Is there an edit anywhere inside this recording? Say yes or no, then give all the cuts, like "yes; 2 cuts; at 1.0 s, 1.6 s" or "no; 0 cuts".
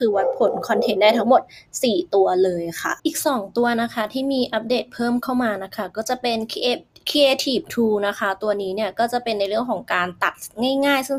yes; 1 cut; at 3.0 s